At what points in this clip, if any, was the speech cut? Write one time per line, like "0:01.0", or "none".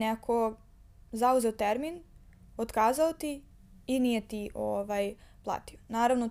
none